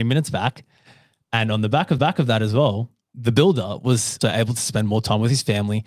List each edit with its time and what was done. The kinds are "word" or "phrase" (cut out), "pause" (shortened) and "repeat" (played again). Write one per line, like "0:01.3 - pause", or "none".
0:02.0 - repeat
0:03.0 - pause
0:04.2 - word